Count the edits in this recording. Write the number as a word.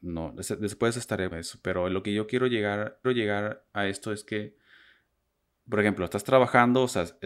two